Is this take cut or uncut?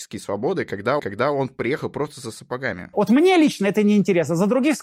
cut